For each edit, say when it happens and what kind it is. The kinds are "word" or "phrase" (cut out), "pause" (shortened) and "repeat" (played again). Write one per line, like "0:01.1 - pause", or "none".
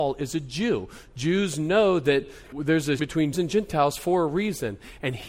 0:02.5 - word
0:03.0 - word
0:03.3 - word